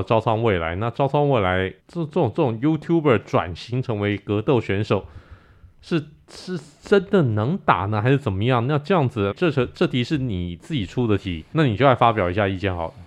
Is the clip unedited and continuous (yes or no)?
no